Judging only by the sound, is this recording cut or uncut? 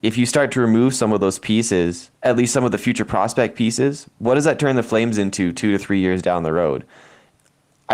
cut